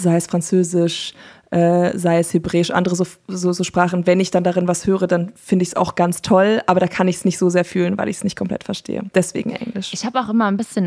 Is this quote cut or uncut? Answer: uncut